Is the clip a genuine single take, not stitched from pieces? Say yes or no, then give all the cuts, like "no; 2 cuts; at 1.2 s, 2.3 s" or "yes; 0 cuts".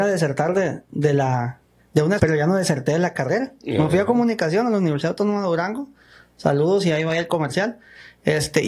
no; 1 cut; at 2.2 s